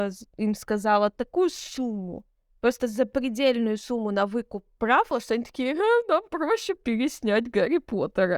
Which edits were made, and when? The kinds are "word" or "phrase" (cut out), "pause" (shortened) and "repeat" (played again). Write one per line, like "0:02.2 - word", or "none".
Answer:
0:02.3 - pause
0:06.8 - word